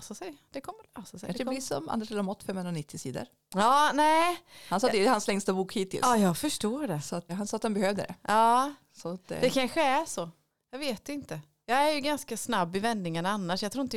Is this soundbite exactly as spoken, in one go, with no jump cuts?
no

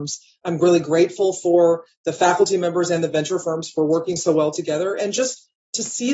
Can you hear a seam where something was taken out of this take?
no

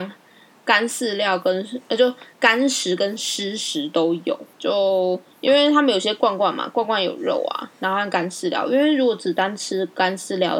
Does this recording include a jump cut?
yes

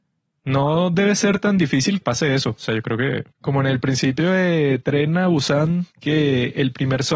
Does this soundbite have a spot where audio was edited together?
yes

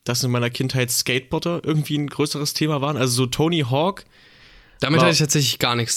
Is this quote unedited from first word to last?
yes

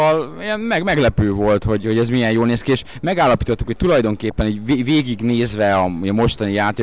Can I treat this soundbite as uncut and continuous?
yes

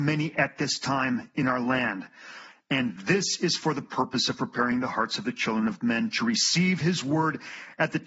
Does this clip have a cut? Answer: no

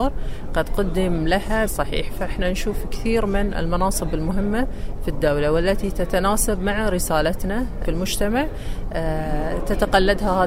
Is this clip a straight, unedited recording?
no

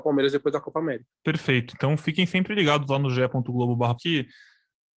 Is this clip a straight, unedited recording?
no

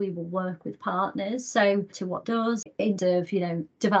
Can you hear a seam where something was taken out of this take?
yes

